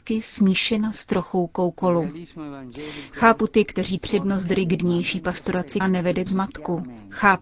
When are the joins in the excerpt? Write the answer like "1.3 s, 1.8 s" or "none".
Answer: 4.0 s, 5.8 s, 6.3 s